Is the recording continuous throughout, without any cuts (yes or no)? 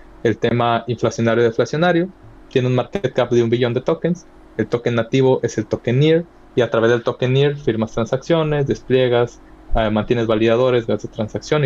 yes